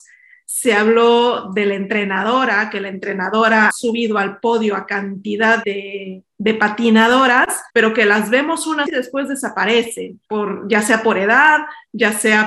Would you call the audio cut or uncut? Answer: cut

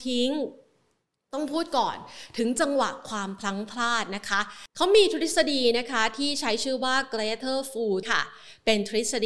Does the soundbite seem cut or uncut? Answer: cut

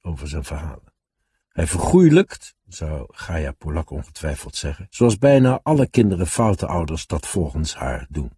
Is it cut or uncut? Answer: cut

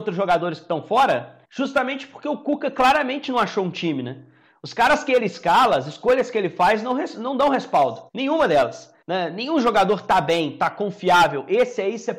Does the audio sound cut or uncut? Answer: cut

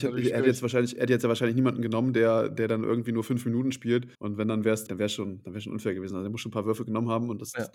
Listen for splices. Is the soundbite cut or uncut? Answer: cut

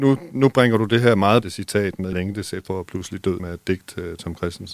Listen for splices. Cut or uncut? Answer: cut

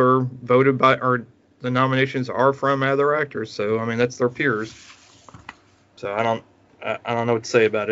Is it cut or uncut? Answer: uncut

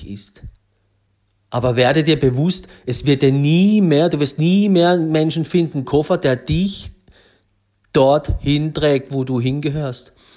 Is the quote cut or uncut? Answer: cut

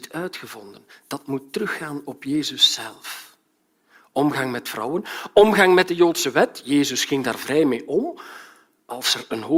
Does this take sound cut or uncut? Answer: uncut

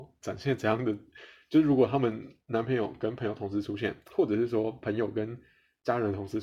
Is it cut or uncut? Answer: cut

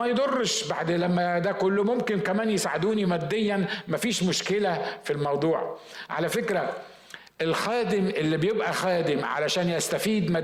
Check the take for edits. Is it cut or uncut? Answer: uncut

